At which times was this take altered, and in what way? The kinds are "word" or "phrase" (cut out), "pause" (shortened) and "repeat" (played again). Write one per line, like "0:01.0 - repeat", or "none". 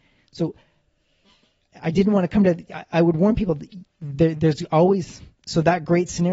none